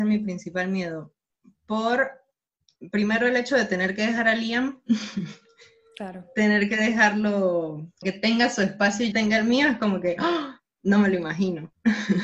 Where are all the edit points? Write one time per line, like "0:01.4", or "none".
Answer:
0:08.0
0:09.1